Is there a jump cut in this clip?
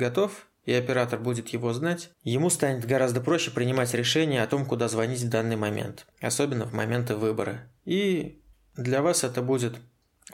yes; 3 cuts; at 2.1 s, 6.1 s, 7.8 s

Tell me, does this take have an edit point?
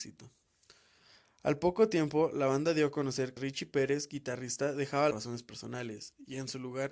yes; 2 cuts; at 3.4 s, 5.1 s

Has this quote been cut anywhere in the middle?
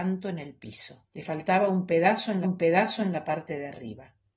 yes; 2 cuts; at 1.1 s, 2.4 s

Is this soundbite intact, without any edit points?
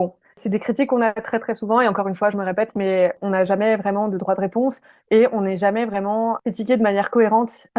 yes; 0 cuts

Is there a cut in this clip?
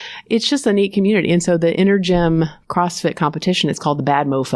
no; 0 cuts

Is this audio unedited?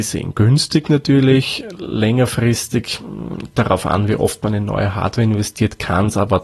no; 1 cut; at 3.5 s

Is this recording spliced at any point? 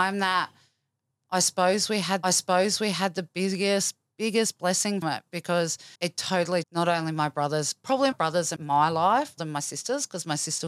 yes; 7 cuts; at 2.2 s, 5.0 s, 6.0 s, 6.6 s, 8.1 s, 8.6 s, 9.4 s

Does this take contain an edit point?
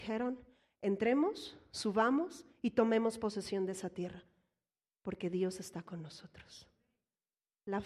no; 0 cuts

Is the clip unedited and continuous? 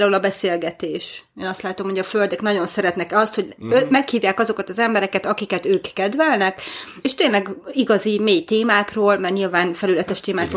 no; 1 cut; at 7.0 s

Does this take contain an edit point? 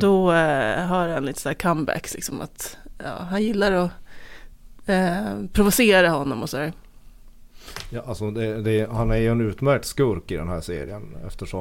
no; 0 cuts

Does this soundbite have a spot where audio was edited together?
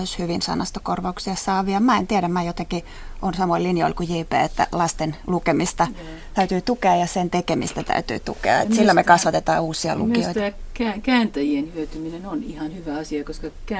no; 0 cuts

